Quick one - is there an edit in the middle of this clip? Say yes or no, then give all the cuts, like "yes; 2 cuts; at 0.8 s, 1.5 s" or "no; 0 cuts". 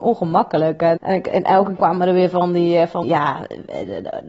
yes; 3 cuts; at 1.0 s, 1.8 s, 3.0 s